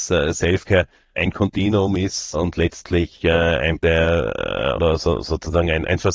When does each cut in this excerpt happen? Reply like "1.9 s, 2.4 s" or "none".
1.1 s, 2.3 s, 3.8 s, 4.8 s